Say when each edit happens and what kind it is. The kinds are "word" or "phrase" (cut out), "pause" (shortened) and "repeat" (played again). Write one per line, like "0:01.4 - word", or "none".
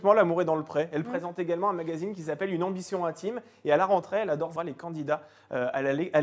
0:04.6 - phrase